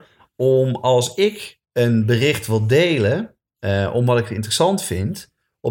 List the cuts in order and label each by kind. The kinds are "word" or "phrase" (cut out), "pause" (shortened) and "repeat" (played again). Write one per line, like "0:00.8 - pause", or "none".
0:01.6 - pause